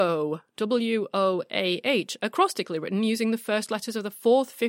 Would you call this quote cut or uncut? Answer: uncut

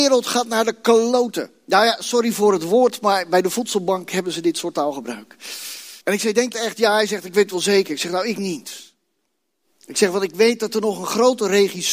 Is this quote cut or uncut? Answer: cut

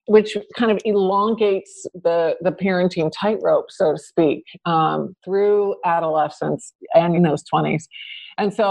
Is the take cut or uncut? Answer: cut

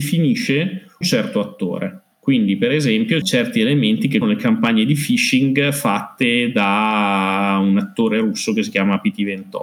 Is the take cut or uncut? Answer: cut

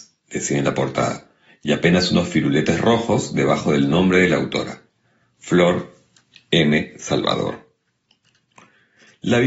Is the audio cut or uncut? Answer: uncut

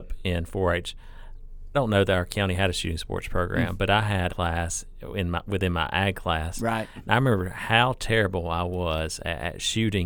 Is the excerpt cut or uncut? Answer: cut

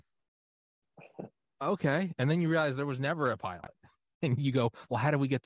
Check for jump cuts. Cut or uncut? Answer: uncut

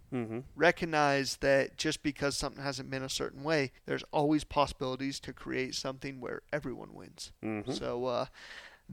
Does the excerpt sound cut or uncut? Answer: cut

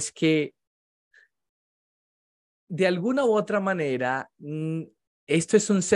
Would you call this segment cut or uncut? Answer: uncut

